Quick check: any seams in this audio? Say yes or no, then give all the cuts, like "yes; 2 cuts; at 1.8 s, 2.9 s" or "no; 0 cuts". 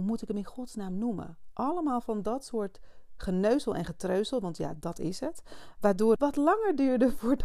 yes; 1 cut; at 6.2 s